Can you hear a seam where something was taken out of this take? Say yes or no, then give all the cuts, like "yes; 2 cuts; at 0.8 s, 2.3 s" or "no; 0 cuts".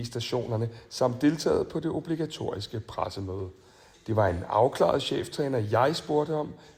no; 0 cuts